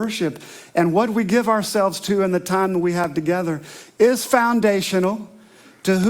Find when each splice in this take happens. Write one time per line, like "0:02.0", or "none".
none